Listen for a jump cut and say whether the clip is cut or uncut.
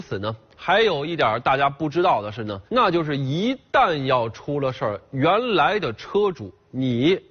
cut